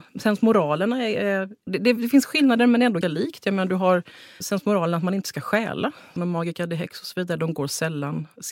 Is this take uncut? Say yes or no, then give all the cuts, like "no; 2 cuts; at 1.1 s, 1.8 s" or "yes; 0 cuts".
no; 4 cuts; at 1.7 s, 3.0 s, 4.4 s, 6.2 s